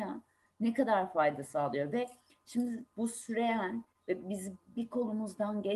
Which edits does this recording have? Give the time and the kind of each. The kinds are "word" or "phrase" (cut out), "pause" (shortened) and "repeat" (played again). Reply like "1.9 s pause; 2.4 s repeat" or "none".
none